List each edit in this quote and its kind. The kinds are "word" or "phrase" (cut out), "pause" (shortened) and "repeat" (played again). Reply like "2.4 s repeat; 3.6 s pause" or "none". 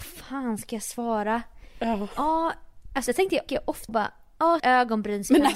3.1 s word; 3.5 s word; 3.9 s word; 4.6 s word